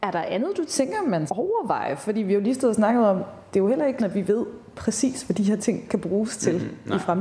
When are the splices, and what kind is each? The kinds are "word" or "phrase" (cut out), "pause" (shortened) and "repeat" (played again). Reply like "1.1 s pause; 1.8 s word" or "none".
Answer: 1.3 s word; 4.0 s word